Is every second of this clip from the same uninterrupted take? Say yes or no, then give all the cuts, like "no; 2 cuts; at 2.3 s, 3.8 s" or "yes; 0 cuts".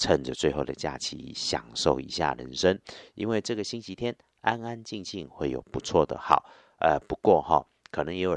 yes; 0 cuts